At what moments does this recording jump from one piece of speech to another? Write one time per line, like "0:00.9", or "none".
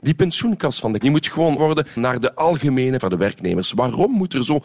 0:01.0
0:01.6
0:02.0
0:03.0